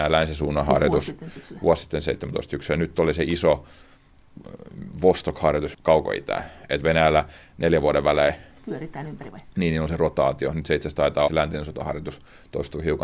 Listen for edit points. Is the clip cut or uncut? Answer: cut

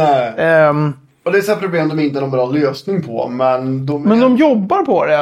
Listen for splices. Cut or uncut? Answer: uncut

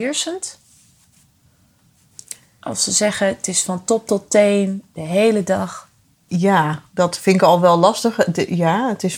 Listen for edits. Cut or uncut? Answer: uncut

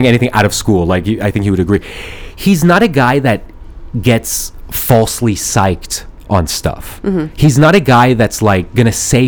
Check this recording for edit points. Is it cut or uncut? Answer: uncut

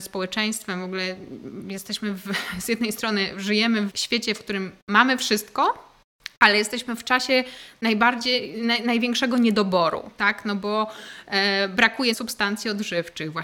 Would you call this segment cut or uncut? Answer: cut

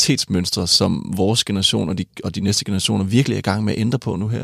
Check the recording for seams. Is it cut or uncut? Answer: uncut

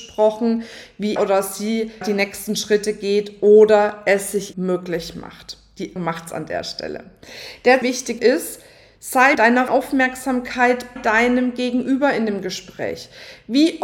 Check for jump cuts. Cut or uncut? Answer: cut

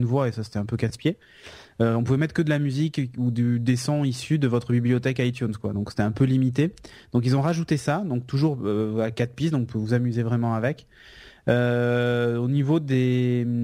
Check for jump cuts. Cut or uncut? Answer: uncut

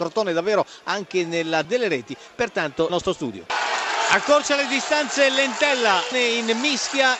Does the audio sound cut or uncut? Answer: cut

